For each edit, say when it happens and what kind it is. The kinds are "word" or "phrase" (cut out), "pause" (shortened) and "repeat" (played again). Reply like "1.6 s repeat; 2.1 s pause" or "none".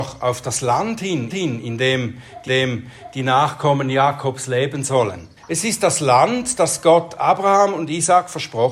1.3 s repeat; 2.5 s repeat; 5.4 s pause